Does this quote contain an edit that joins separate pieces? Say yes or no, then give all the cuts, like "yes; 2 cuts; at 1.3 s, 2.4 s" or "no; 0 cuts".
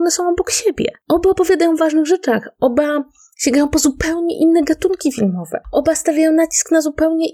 no; 0 cuts